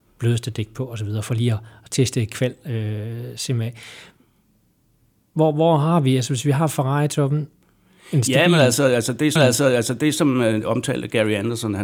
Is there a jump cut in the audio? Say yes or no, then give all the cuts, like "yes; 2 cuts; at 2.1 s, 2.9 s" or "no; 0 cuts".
yes; 1 cut; at 9.4 s